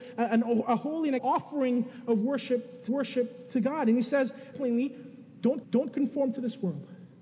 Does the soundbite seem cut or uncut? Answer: cut